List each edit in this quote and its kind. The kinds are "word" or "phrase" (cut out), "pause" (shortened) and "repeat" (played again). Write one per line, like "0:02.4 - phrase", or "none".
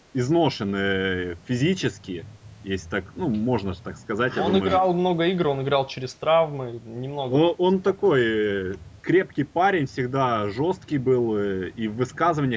0:09.0 - pause